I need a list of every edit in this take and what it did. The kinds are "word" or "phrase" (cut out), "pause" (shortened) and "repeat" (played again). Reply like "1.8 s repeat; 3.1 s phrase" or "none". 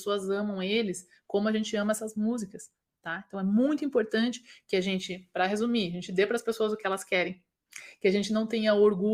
none